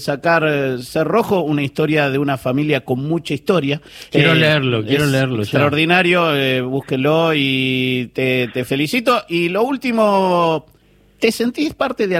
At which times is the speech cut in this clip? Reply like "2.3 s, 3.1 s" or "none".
10.8 s